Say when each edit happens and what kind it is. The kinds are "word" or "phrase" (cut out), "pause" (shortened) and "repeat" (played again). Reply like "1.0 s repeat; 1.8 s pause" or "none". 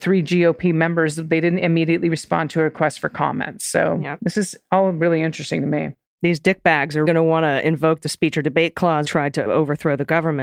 7.0 s word; 9.0 s phrase; 9.4 s word